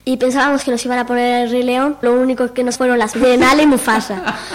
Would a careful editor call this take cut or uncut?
cut